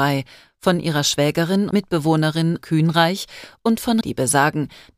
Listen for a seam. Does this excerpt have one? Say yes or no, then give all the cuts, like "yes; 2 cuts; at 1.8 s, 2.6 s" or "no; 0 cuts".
yes; 3 cuts; at 1.7 s, 2.6 s, 4.0 s